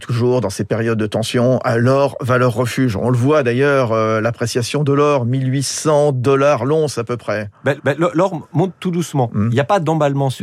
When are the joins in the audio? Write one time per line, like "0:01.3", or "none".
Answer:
0:07.8